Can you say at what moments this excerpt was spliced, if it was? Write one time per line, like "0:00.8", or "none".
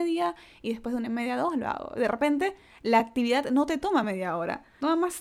none